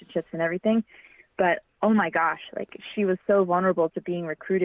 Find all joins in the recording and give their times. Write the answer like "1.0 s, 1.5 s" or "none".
none